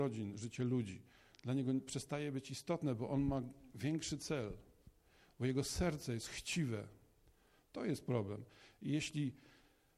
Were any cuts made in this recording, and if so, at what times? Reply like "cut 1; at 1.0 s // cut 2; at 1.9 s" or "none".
none